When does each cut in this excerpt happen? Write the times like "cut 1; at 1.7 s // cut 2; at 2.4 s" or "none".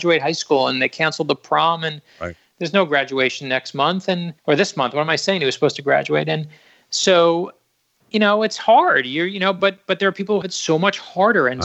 cut 1; at 4.4 s // cut 2; at 10.4 s